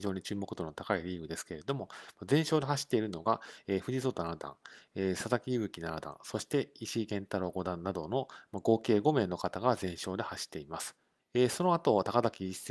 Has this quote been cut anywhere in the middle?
yes; 1 cut; at 11.2 s

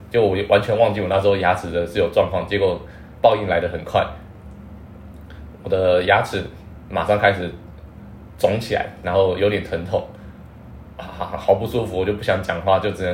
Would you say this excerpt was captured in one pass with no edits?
no; 1 cut; at 10.9 s

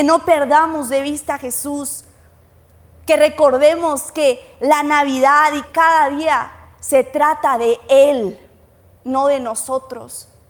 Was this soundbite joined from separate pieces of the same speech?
yes; 1 cut; at 5.6 s

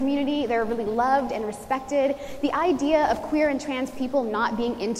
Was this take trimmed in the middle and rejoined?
no; 0 cuts

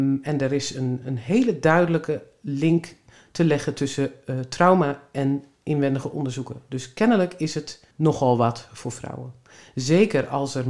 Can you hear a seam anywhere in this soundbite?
yes; 2 cuts; at 1.0 s, 7.9 s

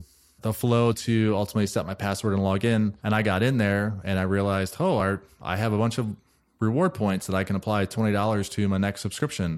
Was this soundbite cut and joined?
no; 0 cuts

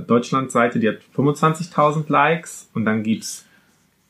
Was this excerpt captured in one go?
no; 1 cut; at 1.1 s

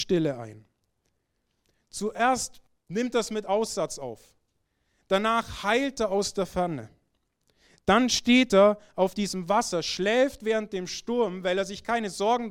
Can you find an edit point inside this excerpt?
no; 0 cuts

